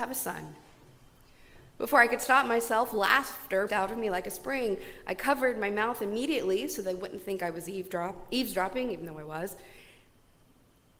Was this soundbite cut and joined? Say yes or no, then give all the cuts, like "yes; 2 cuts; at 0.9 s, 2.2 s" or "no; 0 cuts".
yes; 1 cut; at 3.7 s